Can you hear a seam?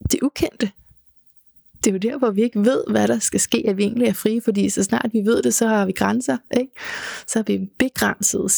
no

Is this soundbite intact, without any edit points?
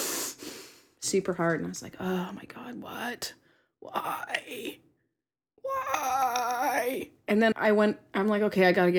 no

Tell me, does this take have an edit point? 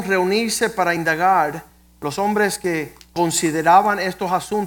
no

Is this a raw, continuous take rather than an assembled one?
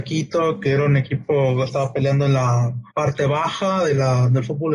no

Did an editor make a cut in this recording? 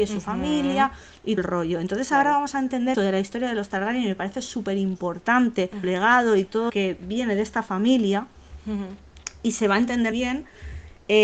yes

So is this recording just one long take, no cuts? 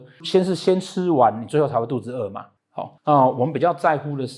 no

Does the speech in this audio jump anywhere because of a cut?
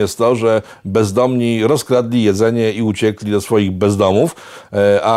no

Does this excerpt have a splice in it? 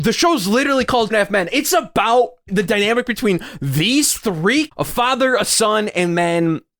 yes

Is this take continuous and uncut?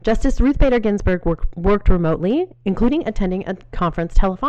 no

